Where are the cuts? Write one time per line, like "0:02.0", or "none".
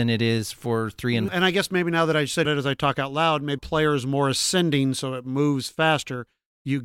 0:01.3
0:02.5
0:03.6